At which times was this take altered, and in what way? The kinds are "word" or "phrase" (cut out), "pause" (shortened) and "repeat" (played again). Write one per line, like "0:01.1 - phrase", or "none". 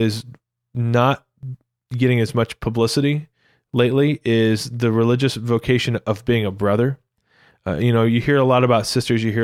none